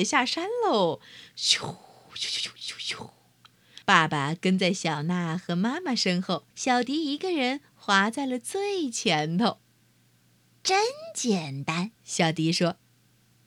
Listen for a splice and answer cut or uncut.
cut